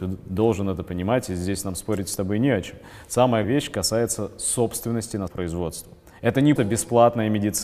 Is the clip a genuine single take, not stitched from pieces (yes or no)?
no